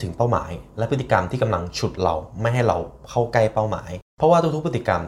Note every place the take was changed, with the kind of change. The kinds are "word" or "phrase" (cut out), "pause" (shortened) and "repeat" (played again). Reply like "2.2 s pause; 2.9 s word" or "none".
4.1 s pause

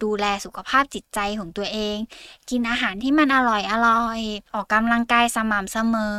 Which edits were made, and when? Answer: 4.5 s pause

